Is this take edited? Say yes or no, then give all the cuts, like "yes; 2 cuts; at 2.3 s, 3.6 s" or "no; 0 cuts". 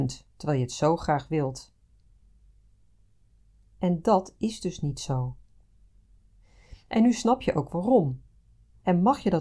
no; 0 cuts